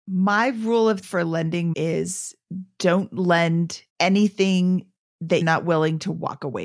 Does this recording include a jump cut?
yes; 4 cuts; at 1.0 s, 1.7 s, 3.9 s, 5.4 s

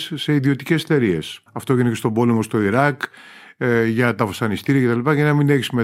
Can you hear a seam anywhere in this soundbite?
yes; 1 cut; at 1.5 s

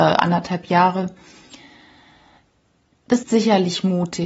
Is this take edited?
yes; 1 cut; at 3.2 s

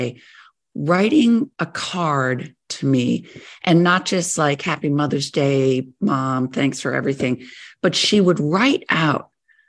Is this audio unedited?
no; 1 cut; at 1.5 s

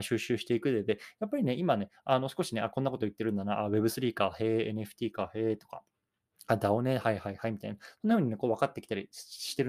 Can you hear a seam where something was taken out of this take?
no; 0 cuts

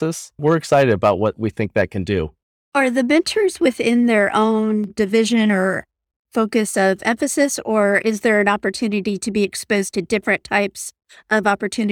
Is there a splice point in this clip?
no; 0 cuts

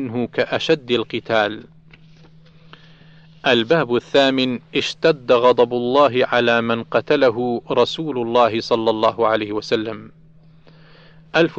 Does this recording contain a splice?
no; 0 cuts

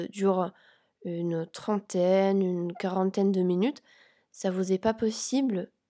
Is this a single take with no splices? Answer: yes; 0 cuts

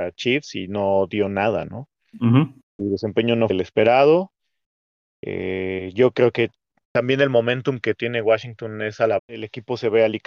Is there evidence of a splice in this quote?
yes; 2 cuts; at 3.5 s, 9.2 s

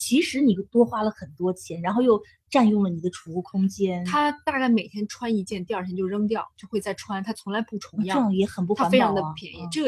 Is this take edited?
no; 0 cuts

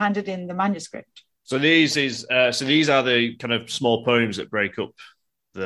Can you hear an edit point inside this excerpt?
no; 0 cuts

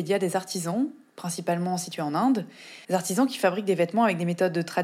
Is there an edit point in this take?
yes; 1 cut; at 2.8 s

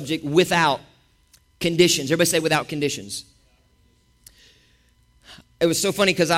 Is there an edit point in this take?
no; 0 cuts

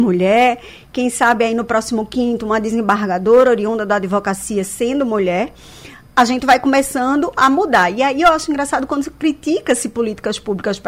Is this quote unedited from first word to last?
yes; 0 cuts

